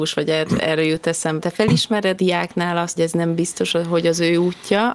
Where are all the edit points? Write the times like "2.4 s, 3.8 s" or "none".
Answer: 1.4 s, 2.2 s, 3.0 s